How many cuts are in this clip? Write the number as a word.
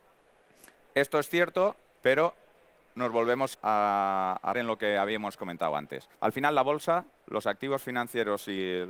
five